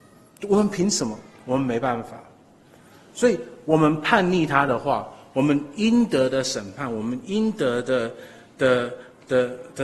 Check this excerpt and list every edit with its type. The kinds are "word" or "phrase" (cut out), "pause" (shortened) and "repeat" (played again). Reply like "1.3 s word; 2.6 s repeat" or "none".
none